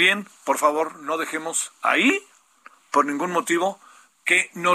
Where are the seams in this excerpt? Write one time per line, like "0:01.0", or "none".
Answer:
none